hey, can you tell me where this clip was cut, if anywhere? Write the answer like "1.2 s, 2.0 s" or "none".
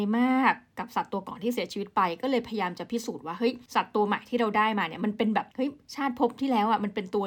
5.5 s